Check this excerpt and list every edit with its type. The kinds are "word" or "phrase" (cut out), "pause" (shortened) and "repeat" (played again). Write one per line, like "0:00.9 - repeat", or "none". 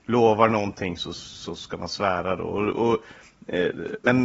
none